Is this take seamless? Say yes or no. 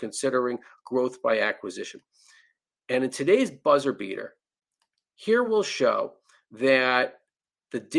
yes